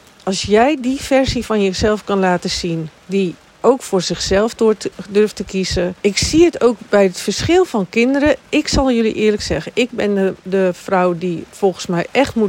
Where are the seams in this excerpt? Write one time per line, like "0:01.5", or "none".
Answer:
0:03.0
0:06.0